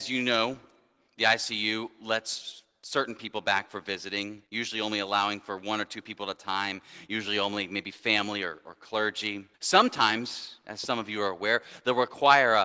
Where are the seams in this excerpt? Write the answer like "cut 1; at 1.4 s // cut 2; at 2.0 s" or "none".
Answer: cut 1; at 4.5 s // cut 2; at 9.5 s